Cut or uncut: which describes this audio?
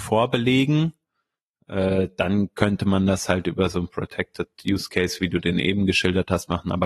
uncut